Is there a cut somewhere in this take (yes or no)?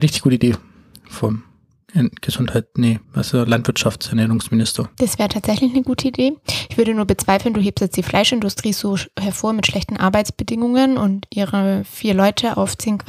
yes